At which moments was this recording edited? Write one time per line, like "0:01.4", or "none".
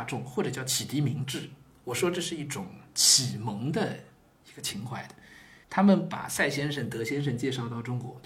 0:05.6